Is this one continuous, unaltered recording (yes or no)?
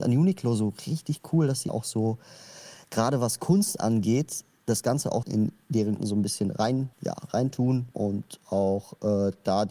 no